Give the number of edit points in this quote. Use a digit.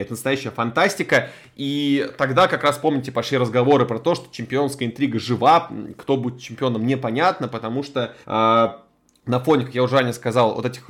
1